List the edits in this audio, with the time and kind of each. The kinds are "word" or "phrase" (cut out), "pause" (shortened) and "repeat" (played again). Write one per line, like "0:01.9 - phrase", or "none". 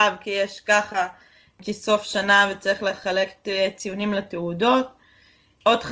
none